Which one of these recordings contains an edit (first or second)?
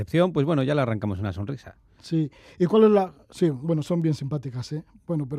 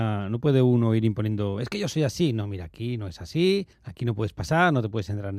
second